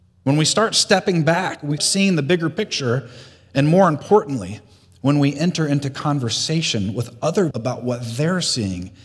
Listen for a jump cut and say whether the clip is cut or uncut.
cut